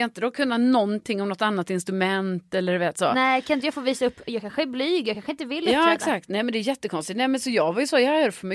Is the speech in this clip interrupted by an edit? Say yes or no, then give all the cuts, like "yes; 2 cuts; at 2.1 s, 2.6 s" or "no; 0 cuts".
no; 0 cuts